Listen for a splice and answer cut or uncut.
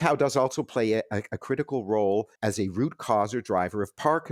cut